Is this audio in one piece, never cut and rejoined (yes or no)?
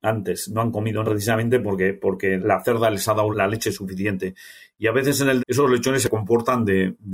no